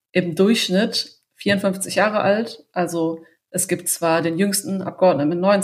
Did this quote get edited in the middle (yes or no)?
no